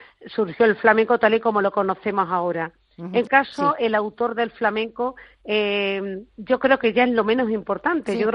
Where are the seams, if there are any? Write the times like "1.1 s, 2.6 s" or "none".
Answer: 3.3 s, 6.3 s